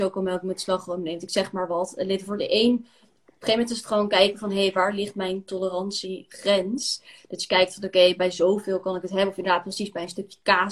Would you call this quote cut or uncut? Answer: uncut